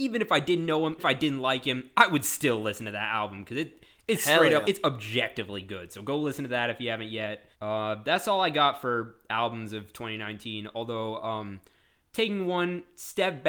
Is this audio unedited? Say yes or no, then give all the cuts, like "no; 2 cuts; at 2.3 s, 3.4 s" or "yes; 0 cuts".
no; 3 cuts; at 1.0 s, 4.6 s, 7.5 s